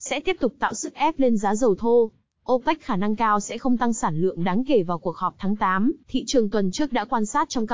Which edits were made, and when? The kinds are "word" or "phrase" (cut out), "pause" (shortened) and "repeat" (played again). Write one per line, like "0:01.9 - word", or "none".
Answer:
0:06.0 - pause